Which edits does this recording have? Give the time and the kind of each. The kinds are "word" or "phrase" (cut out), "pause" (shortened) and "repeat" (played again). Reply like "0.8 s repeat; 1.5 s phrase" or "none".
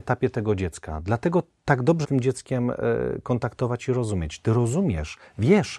2.0 s phrase